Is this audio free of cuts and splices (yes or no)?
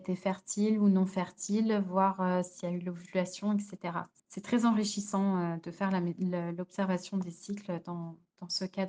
yes